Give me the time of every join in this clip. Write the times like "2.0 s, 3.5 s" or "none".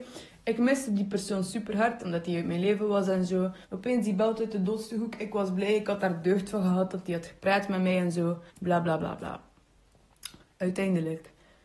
3.6 s, 8.5 s, 9.0 s